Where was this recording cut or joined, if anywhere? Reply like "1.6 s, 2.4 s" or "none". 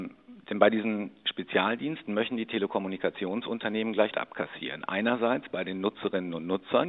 4.1 s